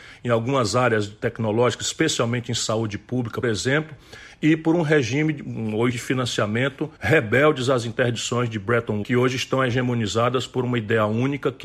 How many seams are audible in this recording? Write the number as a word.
four